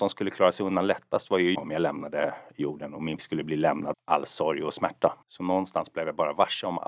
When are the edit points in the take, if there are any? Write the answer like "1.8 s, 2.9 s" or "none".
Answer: 1.5 s, 3.2 s, 3.9 s, 5.2 s